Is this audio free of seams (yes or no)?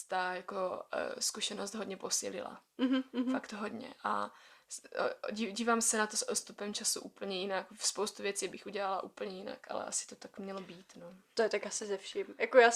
yes